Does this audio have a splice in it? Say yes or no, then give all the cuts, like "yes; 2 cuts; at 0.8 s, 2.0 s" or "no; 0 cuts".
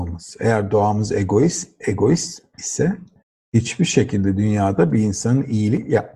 yes; 1 cut; at 3.2 s